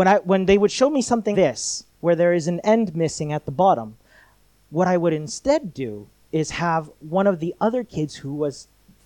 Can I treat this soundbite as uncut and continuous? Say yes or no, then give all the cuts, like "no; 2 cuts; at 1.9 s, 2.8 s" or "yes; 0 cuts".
no; 2 cuts; at 1.3 s, 1.9 s